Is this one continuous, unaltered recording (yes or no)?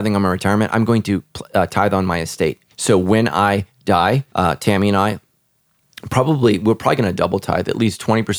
no